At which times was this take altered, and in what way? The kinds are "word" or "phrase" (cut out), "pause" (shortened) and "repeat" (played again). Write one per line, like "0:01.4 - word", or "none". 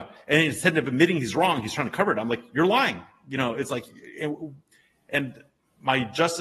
none